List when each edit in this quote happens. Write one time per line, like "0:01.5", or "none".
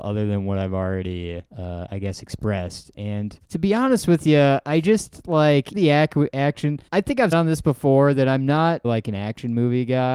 0:01.5
0:03.4
0:05.7
0:06.9
0:07.3
0:08.8